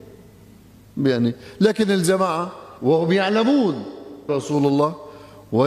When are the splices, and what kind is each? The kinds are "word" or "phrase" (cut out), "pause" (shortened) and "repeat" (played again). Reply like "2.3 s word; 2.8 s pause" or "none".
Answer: 2.8 s pause; 4.3 s word

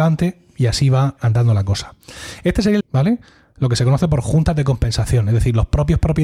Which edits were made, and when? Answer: 1.2 s word; 2.8 s phrase

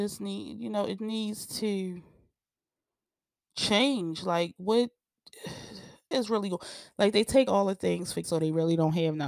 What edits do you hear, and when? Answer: 1.0 s word; 6.1 s word; 7.5 s word; 8.2 s word

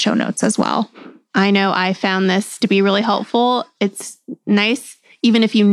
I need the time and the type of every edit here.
none

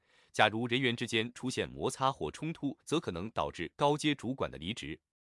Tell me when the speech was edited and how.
2.8 s pause

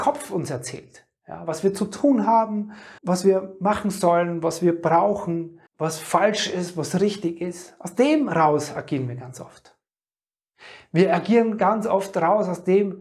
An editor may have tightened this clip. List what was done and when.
3.0 s pause; 5.7 s pause

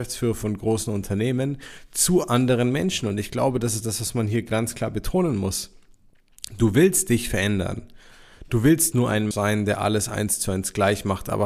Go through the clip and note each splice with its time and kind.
8.9 s word; 9.3 s word

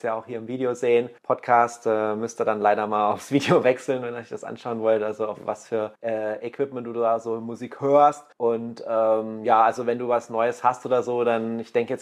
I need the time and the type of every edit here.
1.2 s pause; 5.9 s pause; 8.3 s pause

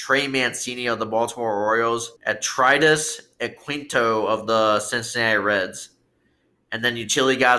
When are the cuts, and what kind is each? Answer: 2.2 s pause

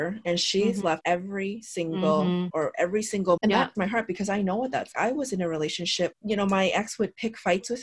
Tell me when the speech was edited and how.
1.0 s word; 2.5 s word; 3.4 s word; 3.7 s word; 4.9 s word; 6.1 s word

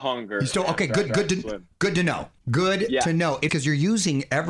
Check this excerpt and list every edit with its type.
1.1 s repeat; 2.4 s pause; 3.5 s phrase

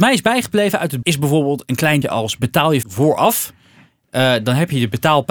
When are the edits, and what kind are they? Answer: 1.0 s word; 2.0 s word; 2.8 s word

